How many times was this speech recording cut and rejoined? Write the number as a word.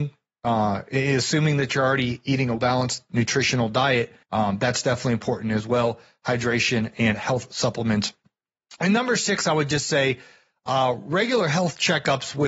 two